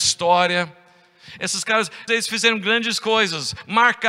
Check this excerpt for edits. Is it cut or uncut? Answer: cut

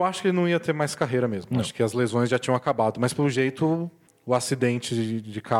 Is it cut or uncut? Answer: uncut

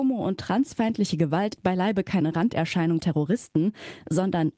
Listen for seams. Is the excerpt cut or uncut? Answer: cut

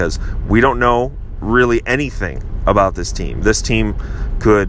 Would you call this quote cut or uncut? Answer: uncut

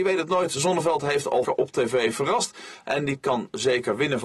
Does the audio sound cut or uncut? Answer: cut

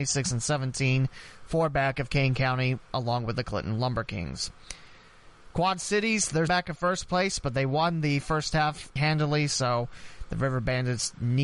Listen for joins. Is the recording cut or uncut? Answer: cut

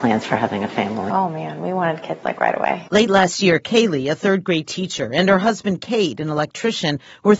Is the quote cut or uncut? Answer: cut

